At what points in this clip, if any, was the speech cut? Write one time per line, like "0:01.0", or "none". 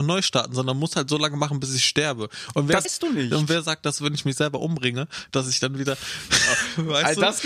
0:02.8